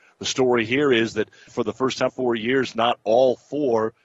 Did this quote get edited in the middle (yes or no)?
yes